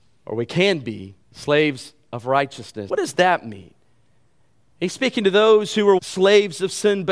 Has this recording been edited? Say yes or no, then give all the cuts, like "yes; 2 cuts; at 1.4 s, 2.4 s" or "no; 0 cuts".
yes; 3 cuts; at 1.2 s, 2.9 s, 6.0 s